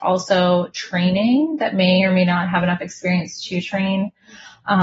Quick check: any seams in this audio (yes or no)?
no